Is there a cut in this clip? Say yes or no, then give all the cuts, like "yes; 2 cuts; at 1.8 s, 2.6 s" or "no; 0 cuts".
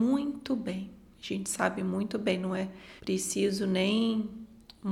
yes; 1 cut; at 3.0 s